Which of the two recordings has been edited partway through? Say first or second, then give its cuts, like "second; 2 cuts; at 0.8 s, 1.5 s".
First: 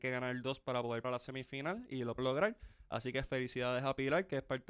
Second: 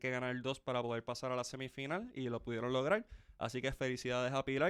first; 2 cuts; at 1.0 s, 2.2 s